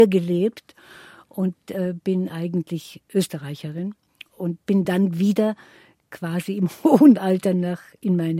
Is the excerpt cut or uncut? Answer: uncut